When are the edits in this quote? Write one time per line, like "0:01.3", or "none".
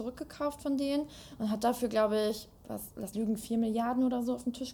0:02.6
0:03.1